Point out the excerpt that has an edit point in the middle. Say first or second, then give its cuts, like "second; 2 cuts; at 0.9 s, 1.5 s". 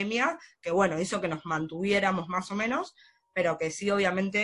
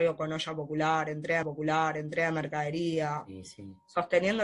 second; 1 cut; at 1.4 s